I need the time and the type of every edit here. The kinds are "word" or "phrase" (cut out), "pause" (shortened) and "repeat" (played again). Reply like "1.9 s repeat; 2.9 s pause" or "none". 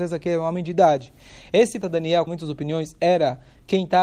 1.8 s word; 2.3 s word